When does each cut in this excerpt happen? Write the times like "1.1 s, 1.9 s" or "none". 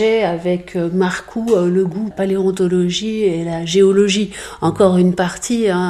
2.1 s